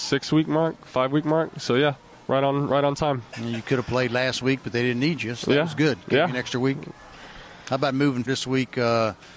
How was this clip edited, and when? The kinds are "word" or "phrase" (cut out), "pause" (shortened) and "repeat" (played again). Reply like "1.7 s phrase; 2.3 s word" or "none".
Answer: 8.3 s word